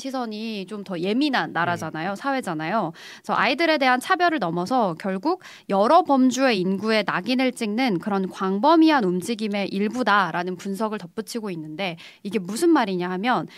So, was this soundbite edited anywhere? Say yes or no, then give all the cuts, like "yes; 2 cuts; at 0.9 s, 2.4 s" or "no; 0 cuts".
no; 0 cuts